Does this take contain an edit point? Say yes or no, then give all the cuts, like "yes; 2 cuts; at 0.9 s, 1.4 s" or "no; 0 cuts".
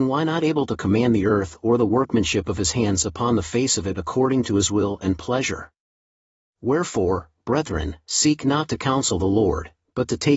no; 0 cuts